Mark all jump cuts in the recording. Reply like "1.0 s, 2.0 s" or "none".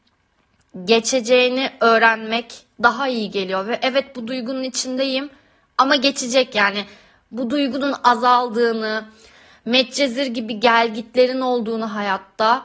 none